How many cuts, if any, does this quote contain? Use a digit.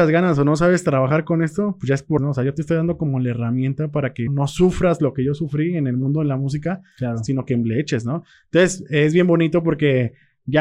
2